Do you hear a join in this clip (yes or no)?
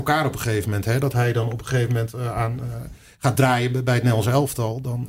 no